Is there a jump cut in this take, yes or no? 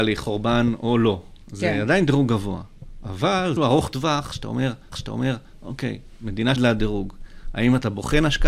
yes